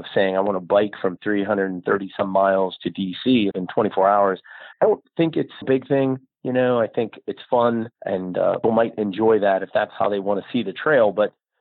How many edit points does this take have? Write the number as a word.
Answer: six